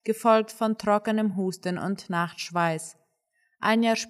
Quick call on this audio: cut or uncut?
uncut